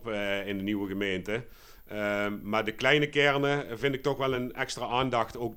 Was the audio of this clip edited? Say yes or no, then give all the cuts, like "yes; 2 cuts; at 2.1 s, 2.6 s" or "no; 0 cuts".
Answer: no; 0 cuts